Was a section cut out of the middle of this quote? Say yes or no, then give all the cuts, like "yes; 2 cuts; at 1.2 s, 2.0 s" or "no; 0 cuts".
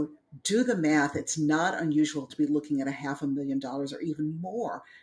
no; 0 cuts